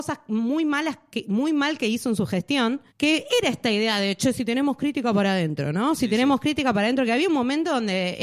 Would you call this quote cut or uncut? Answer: cut